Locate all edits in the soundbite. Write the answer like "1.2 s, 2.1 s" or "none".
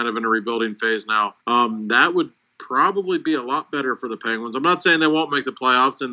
1.4 s